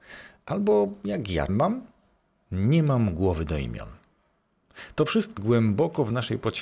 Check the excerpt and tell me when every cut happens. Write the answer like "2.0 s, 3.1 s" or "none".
1.5 s, 5.4 s